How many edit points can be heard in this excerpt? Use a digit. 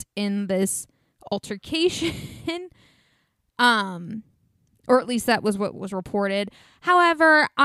0